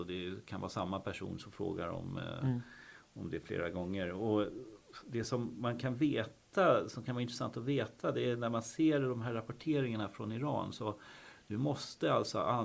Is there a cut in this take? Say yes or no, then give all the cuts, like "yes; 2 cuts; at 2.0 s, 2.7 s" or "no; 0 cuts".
no; 0 cuts